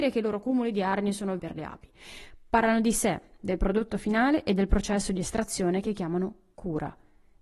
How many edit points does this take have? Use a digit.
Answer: 1